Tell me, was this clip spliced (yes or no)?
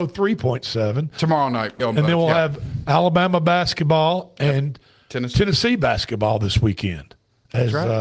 yes